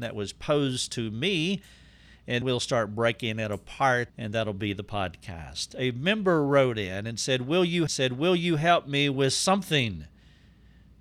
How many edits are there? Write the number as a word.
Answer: three